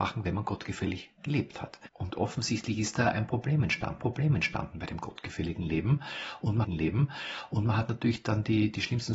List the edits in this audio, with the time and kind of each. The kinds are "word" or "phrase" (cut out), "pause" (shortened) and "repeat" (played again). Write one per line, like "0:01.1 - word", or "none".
0:04.0 - repeat
0:06.6 - repeat